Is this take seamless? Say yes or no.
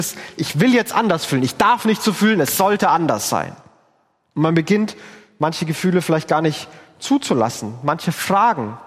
yes